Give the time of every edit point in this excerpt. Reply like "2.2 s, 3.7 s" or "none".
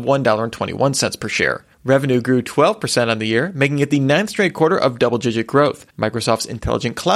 1.7 s, 5.9 s